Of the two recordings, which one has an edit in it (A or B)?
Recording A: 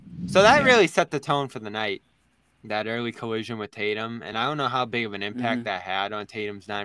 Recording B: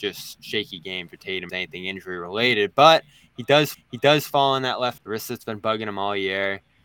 B